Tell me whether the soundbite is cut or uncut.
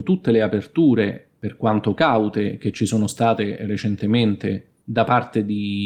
uncut